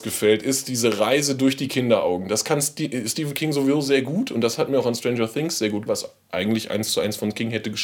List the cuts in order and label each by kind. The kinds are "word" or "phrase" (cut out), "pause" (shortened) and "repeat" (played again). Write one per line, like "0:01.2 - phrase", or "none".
0:05.9 - word